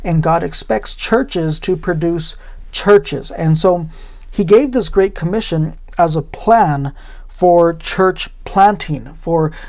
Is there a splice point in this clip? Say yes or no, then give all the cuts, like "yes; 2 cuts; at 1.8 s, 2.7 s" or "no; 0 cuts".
no; 0 cuts